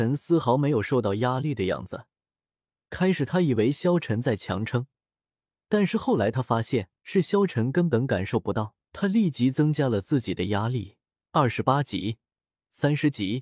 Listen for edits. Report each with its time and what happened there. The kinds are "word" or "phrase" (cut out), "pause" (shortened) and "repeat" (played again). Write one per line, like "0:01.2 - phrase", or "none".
0:07.0 - pause
0:08.8 - pause